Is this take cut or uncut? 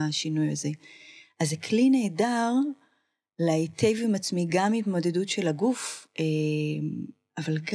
uncut